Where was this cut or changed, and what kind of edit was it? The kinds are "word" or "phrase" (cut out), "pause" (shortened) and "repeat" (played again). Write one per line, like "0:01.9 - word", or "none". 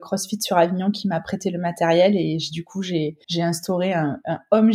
0:03.2 - pause